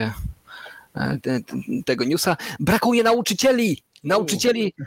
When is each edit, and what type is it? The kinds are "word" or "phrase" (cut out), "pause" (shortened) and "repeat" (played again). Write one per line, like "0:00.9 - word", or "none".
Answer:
none